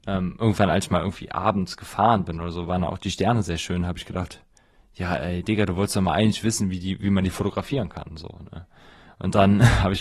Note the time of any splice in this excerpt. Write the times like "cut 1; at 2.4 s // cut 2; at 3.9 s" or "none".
none